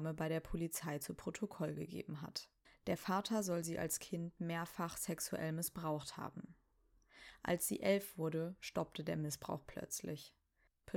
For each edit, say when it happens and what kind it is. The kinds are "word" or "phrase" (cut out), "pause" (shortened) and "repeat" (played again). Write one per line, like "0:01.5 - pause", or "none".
0:02.6 - pause